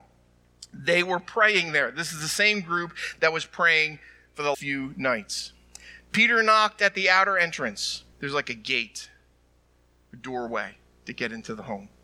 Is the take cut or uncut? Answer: cut